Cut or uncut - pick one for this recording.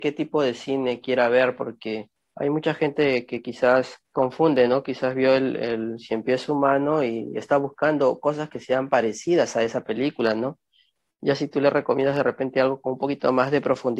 cut